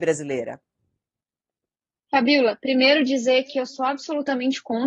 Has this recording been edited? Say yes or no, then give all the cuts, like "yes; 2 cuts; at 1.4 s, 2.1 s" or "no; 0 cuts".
no; 0 cuts